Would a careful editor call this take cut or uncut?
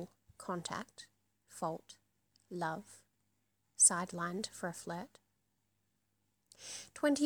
uncut